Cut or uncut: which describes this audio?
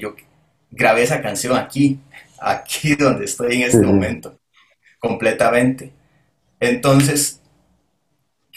uncut